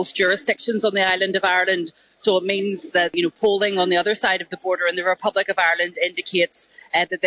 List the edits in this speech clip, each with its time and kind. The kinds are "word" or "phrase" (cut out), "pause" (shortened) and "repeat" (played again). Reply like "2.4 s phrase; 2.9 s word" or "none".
none

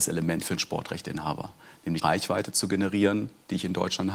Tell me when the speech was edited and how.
2.0 s word

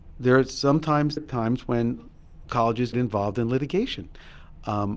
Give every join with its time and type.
1.2 s word; 2.9 s word

